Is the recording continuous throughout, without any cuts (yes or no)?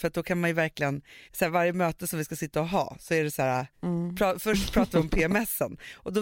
no